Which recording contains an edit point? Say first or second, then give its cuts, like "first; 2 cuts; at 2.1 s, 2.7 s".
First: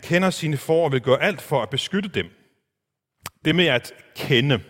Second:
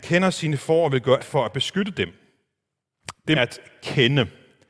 second; 2 cuts; at 1.2 s, 3.3 s